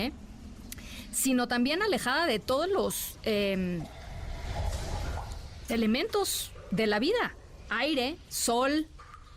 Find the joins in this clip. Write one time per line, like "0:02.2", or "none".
0:05.7